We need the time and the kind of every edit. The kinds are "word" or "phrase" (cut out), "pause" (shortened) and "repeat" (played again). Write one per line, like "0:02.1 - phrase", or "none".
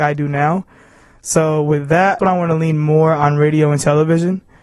0:02.2 - word